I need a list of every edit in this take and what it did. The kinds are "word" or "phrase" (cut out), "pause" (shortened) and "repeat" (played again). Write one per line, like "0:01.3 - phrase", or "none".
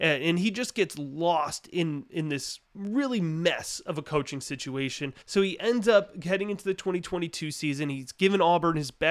0:02.6 - pause
0:05.2 - pause